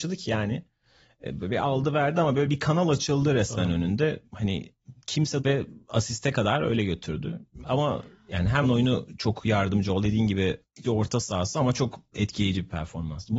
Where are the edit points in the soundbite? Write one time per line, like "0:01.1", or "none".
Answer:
0:05.4
0:08.6
0:10.0
0:10.8